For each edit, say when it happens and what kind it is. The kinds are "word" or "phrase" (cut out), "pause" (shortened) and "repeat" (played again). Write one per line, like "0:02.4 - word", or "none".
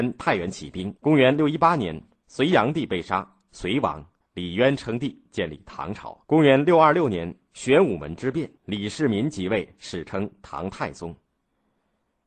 0:01.0 - pause
0:04.2 - pause
0:06.2 - pause
0:08.6 - pause